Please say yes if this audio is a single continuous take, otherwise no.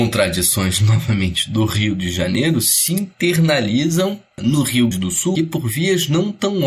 no